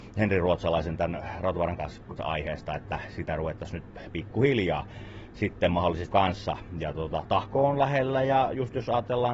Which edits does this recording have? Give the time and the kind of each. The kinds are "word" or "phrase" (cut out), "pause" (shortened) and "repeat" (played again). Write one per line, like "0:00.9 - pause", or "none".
0:01.8 - word
0:02.2 - word
0:06.1 - word
0:06.9 - word